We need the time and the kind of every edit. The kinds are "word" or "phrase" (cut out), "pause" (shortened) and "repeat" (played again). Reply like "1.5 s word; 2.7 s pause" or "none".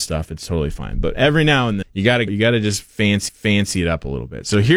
1.8 s word; 2.3 s word; 3.3 s repeat